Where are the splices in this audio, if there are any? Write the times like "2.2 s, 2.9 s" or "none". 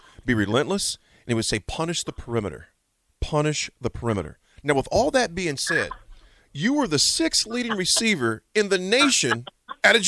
none